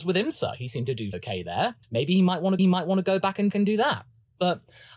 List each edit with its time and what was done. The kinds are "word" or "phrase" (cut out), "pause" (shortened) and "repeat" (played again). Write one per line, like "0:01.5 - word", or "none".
0:01.1 - word
0:01.8 - pause
0:02.6 - repeat
0:03.5 - repeat

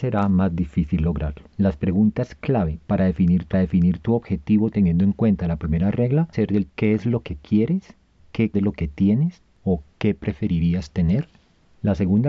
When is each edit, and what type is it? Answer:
0:01.5 - pause
0:03.5 - repeat
0:06.3 - word
0:06.7 - word
0:08.5 - phrase

